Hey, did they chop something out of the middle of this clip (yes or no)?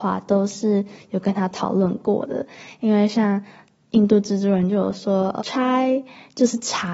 yes